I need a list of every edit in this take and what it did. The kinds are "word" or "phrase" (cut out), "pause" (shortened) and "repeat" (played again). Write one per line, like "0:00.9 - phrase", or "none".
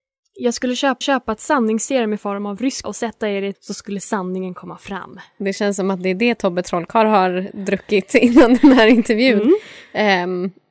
0:01.0 - repeat
0:02.8 - word
0:03.5 - word